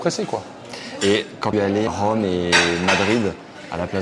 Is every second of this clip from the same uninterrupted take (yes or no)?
no